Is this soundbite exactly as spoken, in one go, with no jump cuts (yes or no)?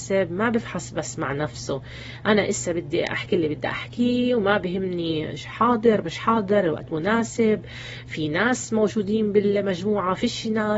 yes